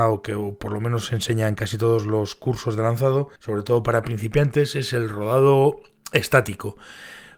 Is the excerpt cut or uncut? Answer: cut